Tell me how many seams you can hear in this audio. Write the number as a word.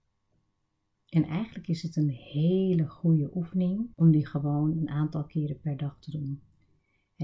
one